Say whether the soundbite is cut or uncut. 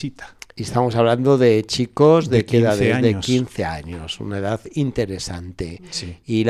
uncut